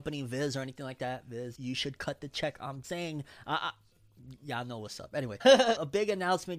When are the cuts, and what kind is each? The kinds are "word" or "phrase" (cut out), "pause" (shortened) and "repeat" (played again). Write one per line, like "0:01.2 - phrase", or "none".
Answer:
0:01.5 - word
0:02.8 - word

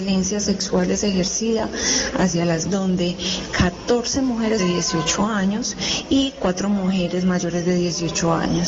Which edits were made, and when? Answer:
0:02.6 - word
0:04.6 - phrase

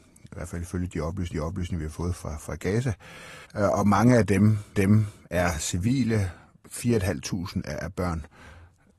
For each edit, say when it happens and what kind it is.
0:01.3 - repeat
0:03.4 - pause
0:04.7 - repeat
0:06.5 - pause

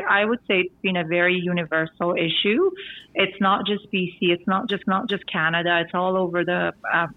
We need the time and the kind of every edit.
0:04.8 - repeat

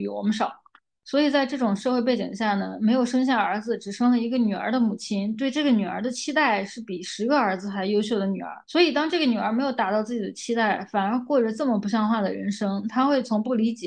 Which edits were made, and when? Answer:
0:08.6 - pause

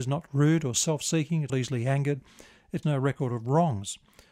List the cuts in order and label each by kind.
0:01.5 - word
0:02.8 - word

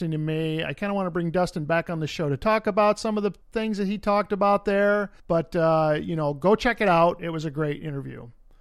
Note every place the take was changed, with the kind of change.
0:03.4 - pause
0:05.2 - pause

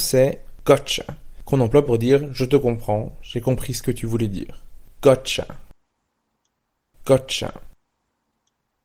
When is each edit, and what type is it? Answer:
none

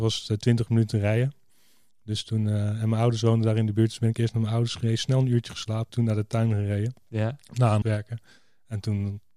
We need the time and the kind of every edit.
0:05.9 - word
0:07.8 - word

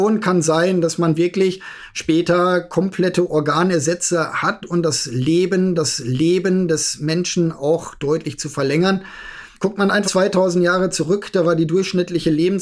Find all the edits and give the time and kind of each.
0:05.7 - repeat
0:09.5 - pause
0:10.0 - word

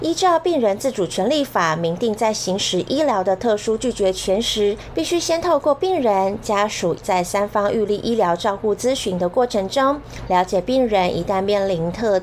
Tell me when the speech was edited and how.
0:07.0 - phrase

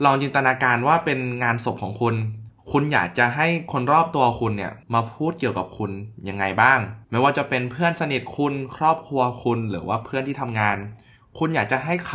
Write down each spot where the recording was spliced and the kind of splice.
0:04.8 - pause
0:07.0 - pause

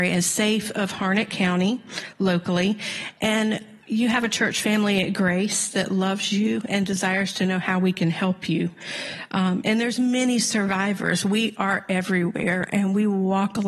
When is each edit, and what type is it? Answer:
none

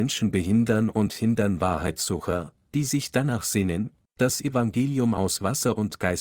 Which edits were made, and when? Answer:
none

